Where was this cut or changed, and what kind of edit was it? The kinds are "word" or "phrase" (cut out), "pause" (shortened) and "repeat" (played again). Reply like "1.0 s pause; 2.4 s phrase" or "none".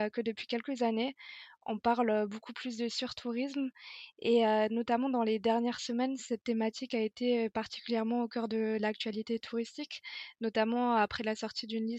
none